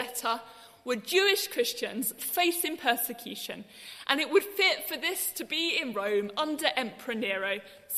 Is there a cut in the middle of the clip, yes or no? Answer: no